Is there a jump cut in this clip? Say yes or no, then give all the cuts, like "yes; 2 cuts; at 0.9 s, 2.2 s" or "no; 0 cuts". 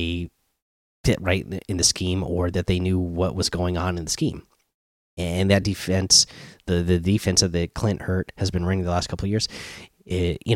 no; 0 cuts